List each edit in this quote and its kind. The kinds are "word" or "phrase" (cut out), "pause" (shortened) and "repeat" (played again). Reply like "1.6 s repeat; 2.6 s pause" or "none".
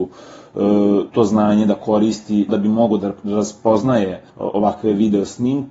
1.1 s word; 2.5 s word; 4.3 s pause